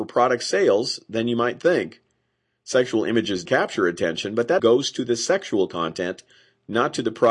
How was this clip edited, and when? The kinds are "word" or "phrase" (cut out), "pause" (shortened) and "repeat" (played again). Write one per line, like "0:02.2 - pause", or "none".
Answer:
0:03.5 - word
0:04.6 - word